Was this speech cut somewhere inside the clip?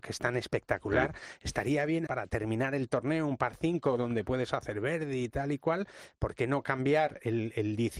yes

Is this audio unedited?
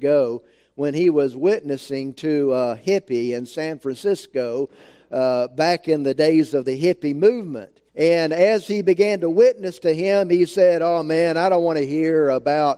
no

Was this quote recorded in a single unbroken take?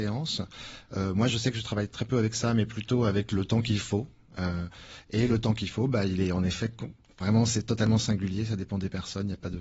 yes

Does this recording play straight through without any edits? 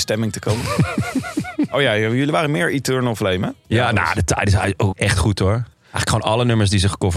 no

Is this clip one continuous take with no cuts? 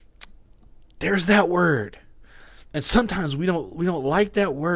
yes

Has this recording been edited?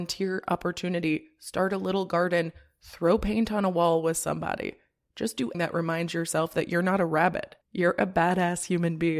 yes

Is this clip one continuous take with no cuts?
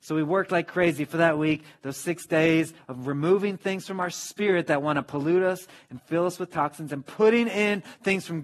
yes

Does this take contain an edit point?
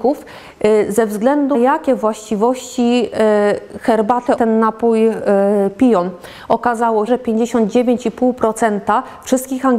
yes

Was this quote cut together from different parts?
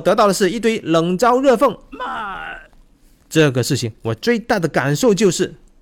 no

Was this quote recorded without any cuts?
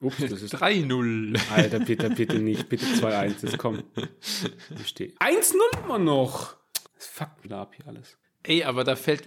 no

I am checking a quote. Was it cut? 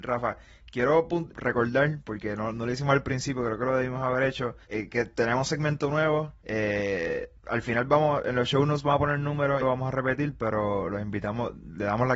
yes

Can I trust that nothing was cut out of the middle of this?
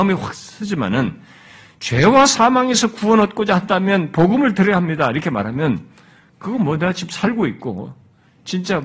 yes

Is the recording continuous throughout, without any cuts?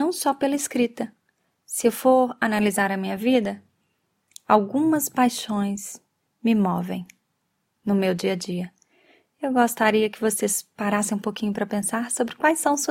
yes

